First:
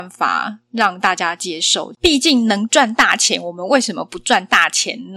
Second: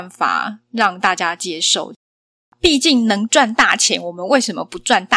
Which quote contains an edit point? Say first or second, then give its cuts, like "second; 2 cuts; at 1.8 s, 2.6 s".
first; 1 cut; at 2.0 s